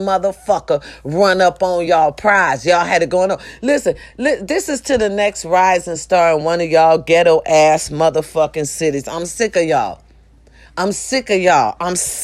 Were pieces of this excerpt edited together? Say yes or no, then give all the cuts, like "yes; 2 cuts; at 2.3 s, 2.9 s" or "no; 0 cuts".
no; 0 cuts